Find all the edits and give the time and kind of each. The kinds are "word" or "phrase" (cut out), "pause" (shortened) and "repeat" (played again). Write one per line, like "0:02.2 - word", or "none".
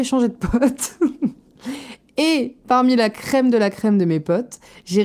none